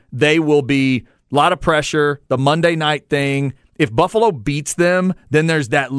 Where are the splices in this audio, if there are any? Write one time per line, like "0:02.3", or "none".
none